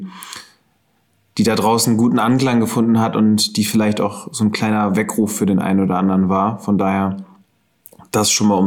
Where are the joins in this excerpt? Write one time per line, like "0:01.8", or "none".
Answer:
none